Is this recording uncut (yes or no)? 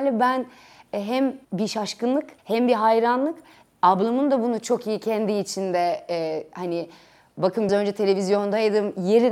no